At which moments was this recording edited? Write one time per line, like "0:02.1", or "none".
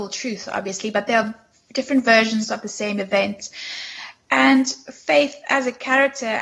none